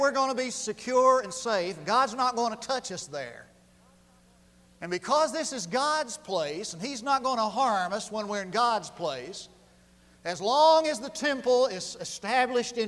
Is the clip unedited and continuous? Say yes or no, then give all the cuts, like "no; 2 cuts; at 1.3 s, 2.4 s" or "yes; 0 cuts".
yes; 0 cuts